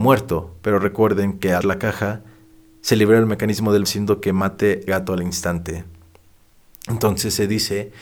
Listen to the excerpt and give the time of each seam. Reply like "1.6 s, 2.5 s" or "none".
1.6 s, 3.8 s, 4.9 s